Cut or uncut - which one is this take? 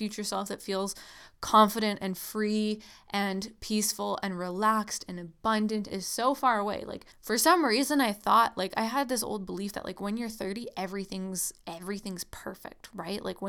cut